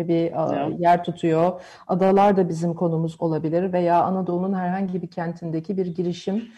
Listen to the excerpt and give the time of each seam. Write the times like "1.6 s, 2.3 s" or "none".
none